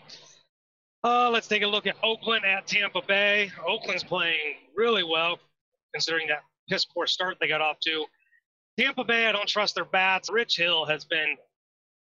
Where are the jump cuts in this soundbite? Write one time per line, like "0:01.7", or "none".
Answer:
0:04.0
0:10.3